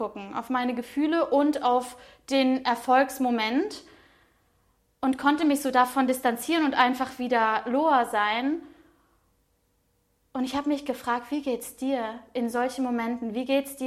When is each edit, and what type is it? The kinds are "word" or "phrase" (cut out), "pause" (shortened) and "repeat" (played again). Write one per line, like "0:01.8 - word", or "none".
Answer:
none